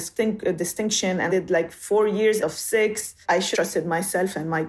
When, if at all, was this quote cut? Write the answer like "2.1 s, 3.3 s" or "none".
1.3 s, 2.4 s, 3.2 s, 3.5 s